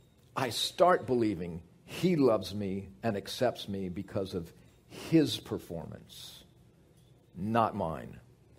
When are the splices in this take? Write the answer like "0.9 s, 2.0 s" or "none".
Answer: none